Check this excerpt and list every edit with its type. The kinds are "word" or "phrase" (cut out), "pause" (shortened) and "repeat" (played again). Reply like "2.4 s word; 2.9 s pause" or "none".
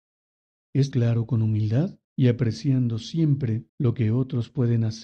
0.9 s word; 2.0 s pause; 3.7 s pause